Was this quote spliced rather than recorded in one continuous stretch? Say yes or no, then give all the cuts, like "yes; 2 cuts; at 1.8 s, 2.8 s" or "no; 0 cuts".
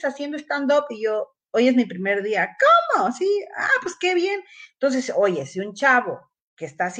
no; 0 cuts